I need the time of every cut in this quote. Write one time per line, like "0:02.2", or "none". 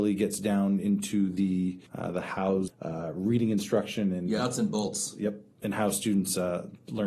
0:01.9
0:02.7
0:04.4
0:05.6

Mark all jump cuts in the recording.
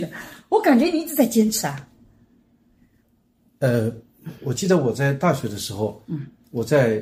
none

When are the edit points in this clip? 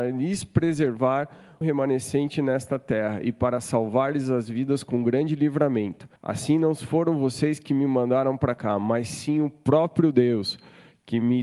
0:01.6
0:06.2

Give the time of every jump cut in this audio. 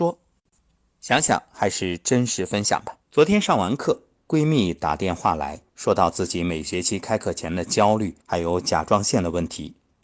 0:03.0
0:05.7
0:08.2

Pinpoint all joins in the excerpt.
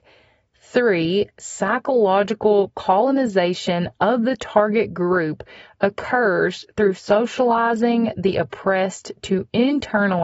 none

